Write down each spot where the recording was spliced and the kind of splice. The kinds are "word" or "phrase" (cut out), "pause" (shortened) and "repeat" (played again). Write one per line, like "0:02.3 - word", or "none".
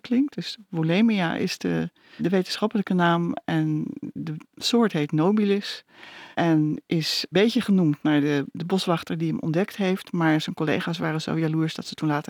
0:02.2 - word
0:06.3 - pause
0:07.3 - word